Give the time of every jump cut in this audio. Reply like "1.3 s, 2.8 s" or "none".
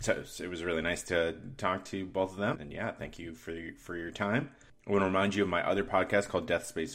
2.5 s